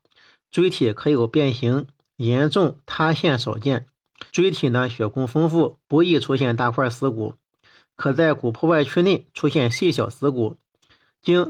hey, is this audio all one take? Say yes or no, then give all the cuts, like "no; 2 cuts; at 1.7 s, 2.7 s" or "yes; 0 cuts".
no; 1 cut; at 4.3 s